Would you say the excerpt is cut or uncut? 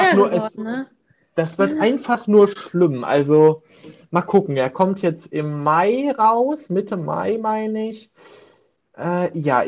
uncut